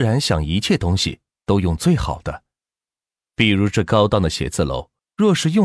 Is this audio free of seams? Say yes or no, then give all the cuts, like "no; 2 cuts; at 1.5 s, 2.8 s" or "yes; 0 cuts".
yes; 0 cuts